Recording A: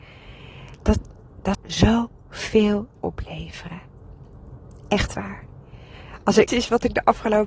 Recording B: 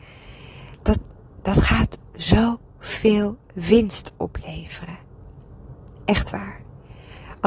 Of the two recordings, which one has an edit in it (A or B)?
A